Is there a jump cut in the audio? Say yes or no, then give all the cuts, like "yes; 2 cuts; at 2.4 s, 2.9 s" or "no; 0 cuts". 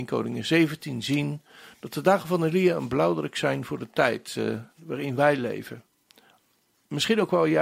yes; 1 cut; at 4.7 s